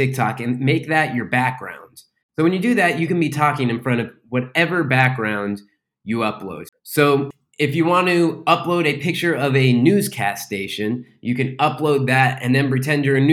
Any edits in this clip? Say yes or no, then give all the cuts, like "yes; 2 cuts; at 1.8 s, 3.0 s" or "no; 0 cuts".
no; 0 cuts